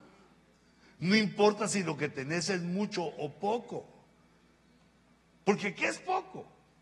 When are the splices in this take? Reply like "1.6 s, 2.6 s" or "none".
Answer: none